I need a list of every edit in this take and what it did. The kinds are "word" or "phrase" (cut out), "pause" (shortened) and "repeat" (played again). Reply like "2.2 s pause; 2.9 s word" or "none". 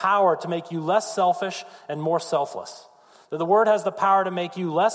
none